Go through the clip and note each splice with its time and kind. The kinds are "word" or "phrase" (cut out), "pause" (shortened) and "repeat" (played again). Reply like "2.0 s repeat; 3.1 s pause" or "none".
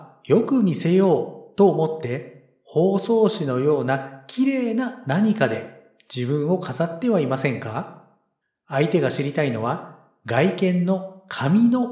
8.4 s pause